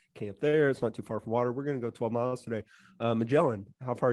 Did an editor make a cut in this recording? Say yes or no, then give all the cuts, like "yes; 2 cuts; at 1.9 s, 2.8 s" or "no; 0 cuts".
no; 0 cuts